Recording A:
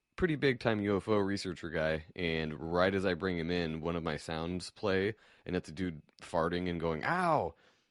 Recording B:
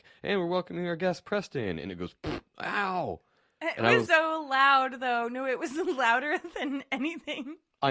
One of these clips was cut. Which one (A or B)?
B